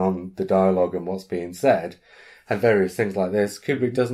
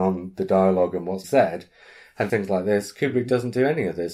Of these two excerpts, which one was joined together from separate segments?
second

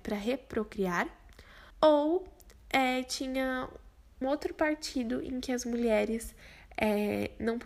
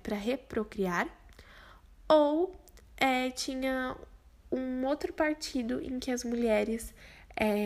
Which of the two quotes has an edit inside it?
first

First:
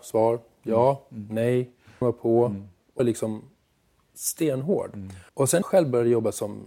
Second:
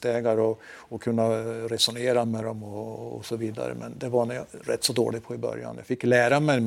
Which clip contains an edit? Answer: first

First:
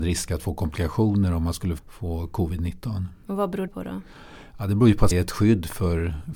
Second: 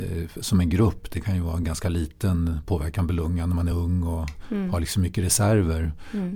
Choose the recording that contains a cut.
first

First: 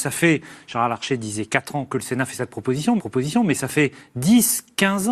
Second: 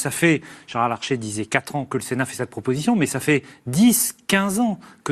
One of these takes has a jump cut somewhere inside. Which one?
first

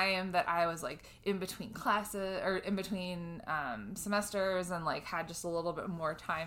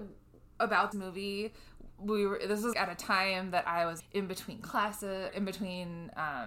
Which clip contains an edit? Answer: second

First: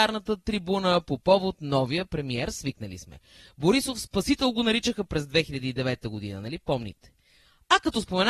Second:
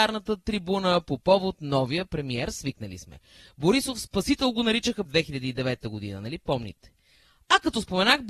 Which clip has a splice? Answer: second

